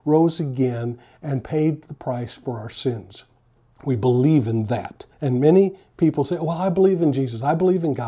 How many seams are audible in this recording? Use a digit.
2